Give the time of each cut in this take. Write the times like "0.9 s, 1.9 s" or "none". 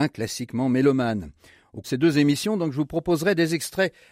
1.8 s